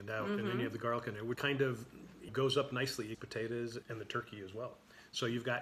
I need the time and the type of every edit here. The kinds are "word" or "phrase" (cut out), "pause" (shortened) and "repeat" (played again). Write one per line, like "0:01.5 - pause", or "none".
0:01.4 - word
0:02.3 - word
0:03.1 - word
0:03.8 - word